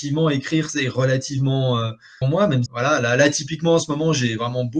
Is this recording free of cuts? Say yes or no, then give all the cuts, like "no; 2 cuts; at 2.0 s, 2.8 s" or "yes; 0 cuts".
no; 2 cuts; at 2.2 s, 2.7 s